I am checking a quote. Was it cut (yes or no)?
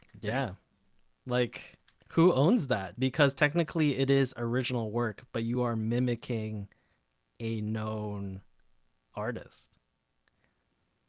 no